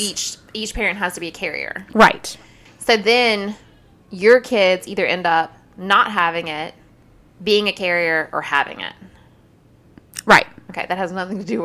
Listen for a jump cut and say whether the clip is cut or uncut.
uncut